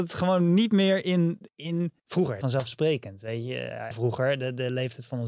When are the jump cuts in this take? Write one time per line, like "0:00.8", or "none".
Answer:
0:02.0
0:02.4
0:03.9